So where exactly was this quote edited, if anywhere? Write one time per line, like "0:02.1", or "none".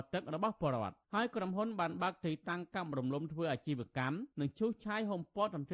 0:01.0
0:04.3